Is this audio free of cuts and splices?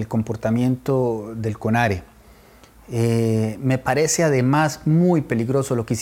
yes; 0 cuts

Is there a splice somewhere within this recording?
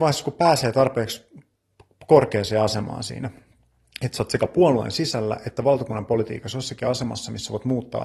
no; 0 cuts

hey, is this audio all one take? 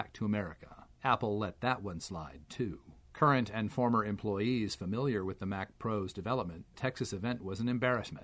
no; 3 cuts; at 0.9 s, 3.0 s, 6.7 s

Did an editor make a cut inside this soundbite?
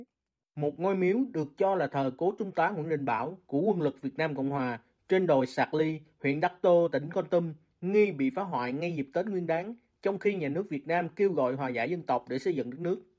no; 0 cuts

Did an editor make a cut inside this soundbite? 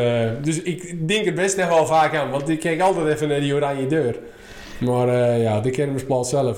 no; 0 cuts

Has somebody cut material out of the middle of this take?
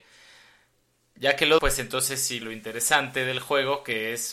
yes; 2 cuts; at 1.6 s, 2.4 s

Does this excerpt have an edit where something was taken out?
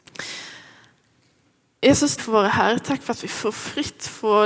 yes; 1 cut; at 2.2 s

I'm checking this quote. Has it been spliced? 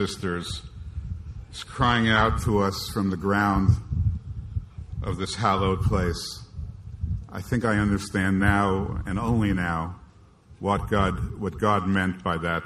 no; 0 cuts

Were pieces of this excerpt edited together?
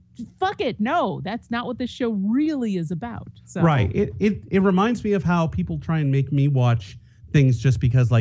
no; 0 cuts

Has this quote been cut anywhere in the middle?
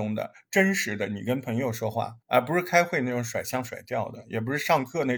yes; 1 cut; at 2.2 s

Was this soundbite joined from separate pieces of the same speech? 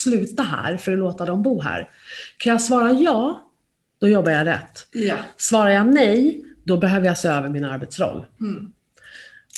no; 0 cuts

